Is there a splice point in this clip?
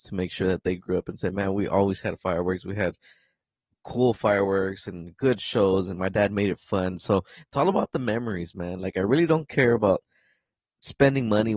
no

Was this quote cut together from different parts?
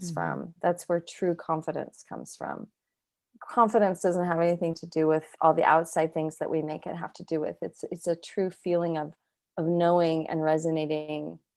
no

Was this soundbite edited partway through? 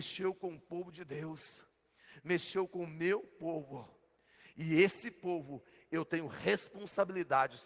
no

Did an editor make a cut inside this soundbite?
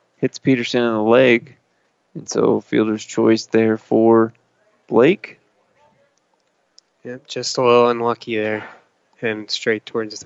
no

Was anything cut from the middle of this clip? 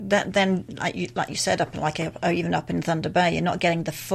no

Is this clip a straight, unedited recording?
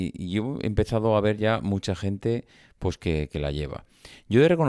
yes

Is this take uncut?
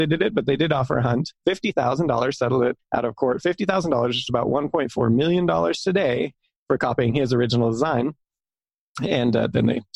yes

